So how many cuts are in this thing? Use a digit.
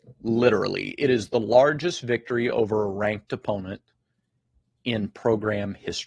0